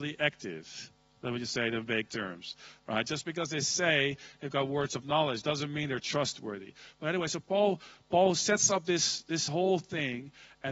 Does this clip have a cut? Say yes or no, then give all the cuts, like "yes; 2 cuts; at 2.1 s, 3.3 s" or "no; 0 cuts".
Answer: no; 0 cuts